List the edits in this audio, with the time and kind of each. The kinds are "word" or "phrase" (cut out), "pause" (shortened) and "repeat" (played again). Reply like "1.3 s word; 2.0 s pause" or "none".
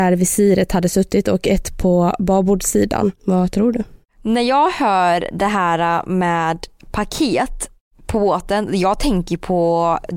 3.2 s pause